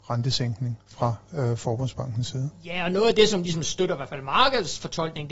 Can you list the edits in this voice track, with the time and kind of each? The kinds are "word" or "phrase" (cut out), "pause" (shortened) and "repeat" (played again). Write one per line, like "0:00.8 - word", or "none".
none